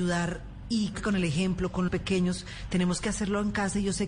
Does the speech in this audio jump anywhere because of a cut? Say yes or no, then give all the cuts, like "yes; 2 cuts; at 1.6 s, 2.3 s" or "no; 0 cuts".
yes; 2 cuts; at 0.9 s, 1.9 s